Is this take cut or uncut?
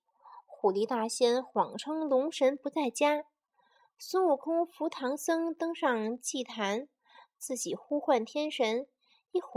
uncut